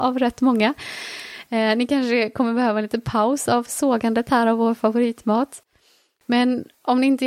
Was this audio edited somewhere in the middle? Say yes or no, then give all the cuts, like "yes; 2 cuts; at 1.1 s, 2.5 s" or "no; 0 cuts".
no; 0 cuts